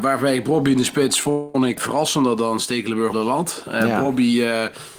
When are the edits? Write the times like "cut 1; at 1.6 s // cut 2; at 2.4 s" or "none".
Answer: cut 1; at 1.8 s // cut 2; at 3.1 s